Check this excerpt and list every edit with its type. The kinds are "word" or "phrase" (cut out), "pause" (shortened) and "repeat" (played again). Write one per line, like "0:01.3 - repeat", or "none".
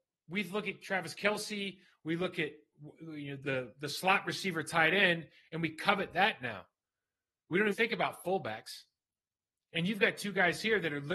0:03.4 - word
0:07.7 - word